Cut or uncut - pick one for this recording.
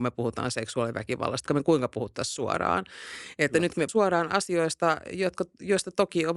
cut